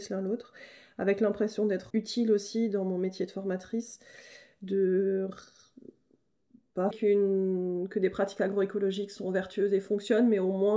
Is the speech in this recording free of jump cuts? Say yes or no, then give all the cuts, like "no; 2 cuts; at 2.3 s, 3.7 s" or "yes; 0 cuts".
no; 2 cuts; at 1.9 s, 6.9 s